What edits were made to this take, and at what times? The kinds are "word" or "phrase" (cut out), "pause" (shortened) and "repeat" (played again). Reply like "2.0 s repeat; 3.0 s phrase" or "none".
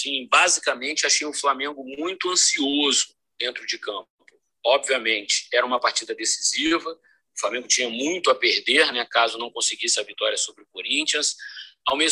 none

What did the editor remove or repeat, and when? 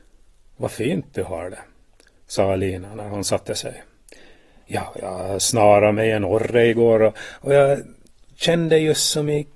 none

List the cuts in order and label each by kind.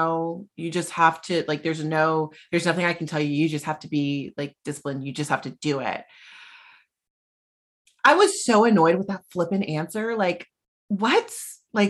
none

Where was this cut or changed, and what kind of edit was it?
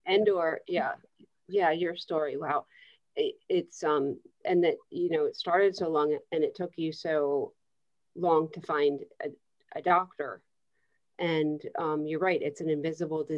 none

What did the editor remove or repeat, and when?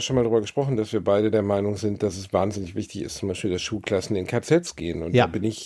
none

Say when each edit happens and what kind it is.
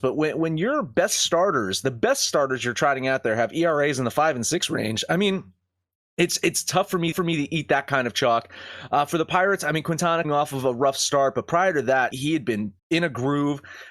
7.1 s repeat; 10.2 s word; 12.1 s word; 12.8 s pause

